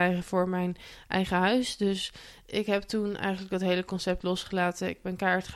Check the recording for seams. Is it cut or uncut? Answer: uncut